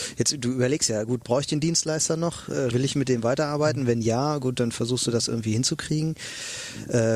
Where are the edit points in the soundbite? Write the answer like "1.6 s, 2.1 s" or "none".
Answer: 2.7 s